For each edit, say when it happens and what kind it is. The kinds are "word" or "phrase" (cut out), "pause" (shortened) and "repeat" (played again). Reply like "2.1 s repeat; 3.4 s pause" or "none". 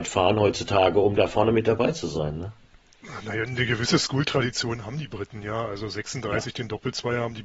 none